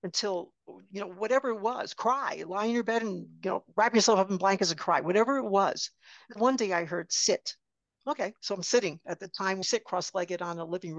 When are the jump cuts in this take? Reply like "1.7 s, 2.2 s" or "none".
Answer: 6.4 s, 7.9 s, 9.6 s